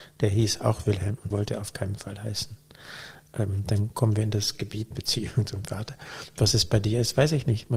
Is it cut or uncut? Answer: cut